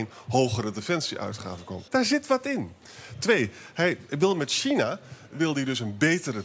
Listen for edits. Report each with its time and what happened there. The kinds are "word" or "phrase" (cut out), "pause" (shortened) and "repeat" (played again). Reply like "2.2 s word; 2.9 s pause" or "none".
1.9 s pause